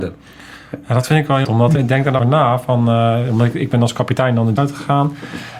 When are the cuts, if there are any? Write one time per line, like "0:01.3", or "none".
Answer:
0:01.4
0:01.8
0:02.2
0:04.6